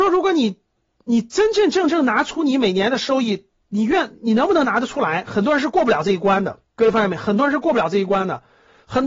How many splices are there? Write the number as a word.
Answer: one